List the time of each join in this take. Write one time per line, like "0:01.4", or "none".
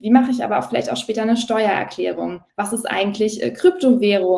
0:02.5